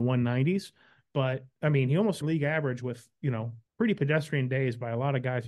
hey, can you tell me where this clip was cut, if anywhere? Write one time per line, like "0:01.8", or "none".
0:02.2
0:03.7